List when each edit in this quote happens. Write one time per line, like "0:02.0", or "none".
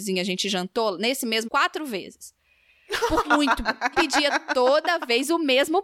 0:01.4
0:03.2
0:03.9